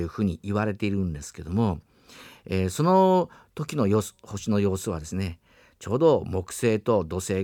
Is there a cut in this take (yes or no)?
no